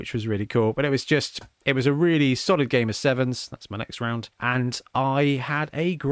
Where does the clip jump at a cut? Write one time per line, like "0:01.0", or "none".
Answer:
0:01.5
0:04.3